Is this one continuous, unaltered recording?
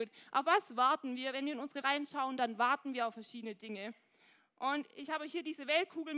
no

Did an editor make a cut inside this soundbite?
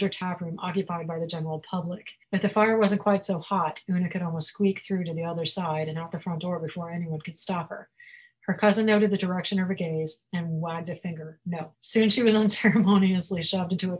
yes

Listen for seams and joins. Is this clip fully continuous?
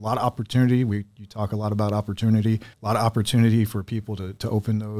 no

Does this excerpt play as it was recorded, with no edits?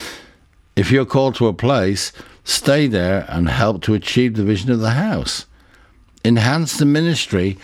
yes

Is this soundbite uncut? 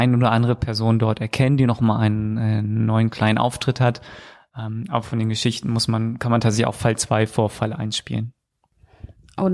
yes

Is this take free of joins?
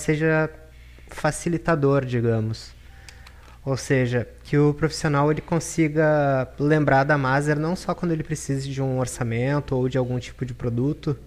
no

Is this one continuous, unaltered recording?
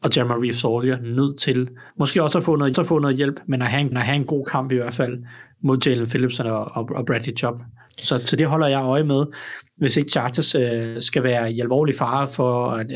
no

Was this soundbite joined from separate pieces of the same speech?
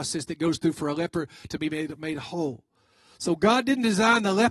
no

